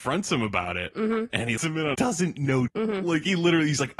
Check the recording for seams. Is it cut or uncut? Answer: cut